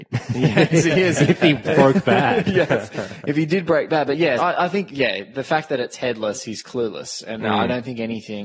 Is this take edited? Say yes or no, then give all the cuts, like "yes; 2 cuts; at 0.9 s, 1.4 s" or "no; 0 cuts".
yes; 1 cut; at 4.4 s